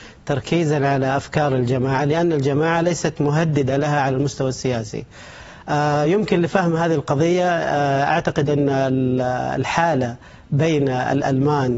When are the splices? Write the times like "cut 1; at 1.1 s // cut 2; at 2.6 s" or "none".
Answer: none